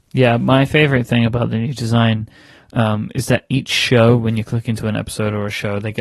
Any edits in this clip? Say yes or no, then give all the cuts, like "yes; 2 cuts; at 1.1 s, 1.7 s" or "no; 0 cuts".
no; 0 cuts